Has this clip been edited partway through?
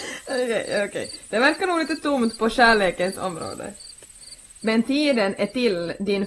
no; 0 cuts

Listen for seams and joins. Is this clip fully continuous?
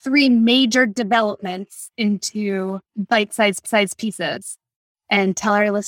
no; 2 cuts; at 2.8 s, 3.6 s

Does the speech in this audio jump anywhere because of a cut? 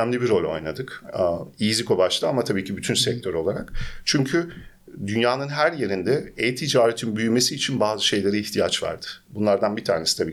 no; 0 cuts

